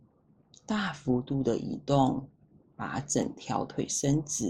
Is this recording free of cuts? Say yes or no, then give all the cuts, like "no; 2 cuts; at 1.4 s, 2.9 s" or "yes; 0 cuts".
yes; 0 cuts